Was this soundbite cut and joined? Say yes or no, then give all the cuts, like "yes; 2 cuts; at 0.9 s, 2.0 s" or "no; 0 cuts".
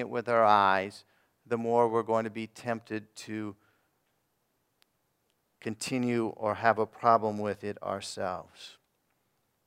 no; 0 cuts